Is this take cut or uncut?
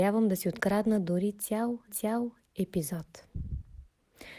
cut